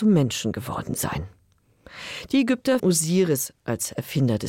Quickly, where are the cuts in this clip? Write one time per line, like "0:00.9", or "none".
0:02.8